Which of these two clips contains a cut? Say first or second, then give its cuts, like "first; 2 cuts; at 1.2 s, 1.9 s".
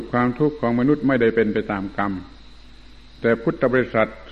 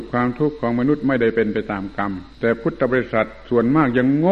second; 1 cut; at 2.3 s